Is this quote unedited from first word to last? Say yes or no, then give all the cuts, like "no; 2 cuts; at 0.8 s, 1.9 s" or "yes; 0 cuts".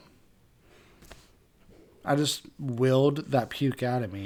yes; 0 cuts